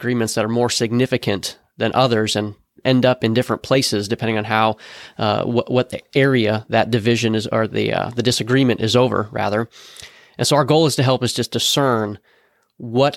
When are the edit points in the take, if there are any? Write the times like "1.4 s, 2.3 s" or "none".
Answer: none